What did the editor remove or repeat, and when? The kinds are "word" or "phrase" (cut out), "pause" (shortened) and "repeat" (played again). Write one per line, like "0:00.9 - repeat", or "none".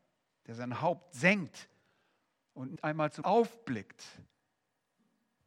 0:02.8 - word
0:03.2 - word